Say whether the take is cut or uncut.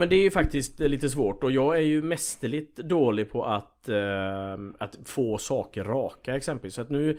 uncut